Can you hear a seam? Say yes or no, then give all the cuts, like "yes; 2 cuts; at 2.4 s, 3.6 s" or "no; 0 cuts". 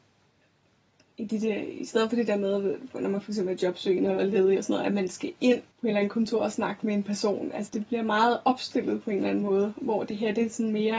yes; 2 cuts; at 5.7 s, 7.7 s